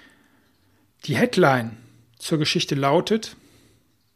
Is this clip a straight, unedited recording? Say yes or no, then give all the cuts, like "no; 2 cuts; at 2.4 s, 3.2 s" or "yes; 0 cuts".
yes; 0 cuts